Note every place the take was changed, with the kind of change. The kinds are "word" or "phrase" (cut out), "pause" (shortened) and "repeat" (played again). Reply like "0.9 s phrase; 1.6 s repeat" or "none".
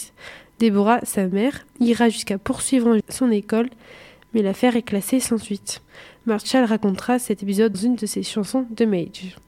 3.0 s word; 7.7 s word